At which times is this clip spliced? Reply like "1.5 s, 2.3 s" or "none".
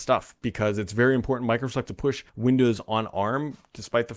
1.9 s, 2.3 s